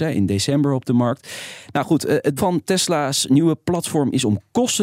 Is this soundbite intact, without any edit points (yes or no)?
no